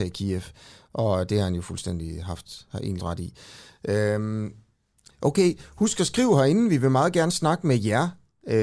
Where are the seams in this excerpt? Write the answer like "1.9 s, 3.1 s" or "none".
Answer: 3.0 s